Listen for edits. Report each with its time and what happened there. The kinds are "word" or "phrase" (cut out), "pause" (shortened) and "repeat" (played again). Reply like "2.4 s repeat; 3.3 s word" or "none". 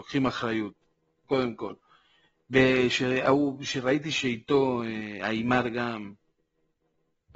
none